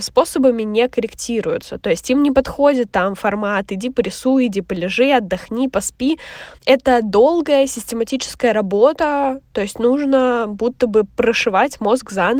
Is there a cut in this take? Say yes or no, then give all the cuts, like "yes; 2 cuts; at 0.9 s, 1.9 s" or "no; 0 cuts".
yes; 1 cut; at 6.6 s